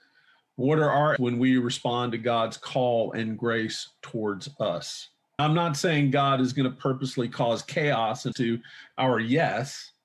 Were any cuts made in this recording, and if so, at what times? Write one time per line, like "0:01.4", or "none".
0:01.2
0:05.4
0:08.3